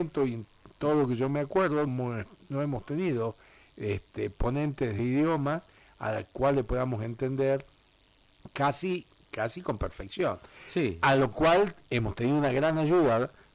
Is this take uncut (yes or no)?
no